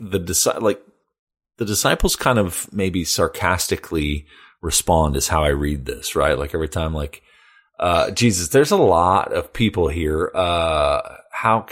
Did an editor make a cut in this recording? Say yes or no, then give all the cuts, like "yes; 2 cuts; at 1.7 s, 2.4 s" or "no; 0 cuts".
no; 0 cuts